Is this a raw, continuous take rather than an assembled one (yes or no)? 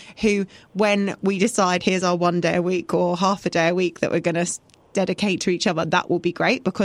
yes